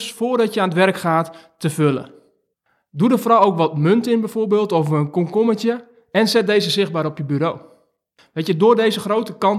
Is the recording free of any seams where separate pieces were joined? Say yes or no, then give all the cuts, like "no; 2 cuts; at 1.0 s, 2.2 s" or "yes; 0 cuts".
yes; 0 cuts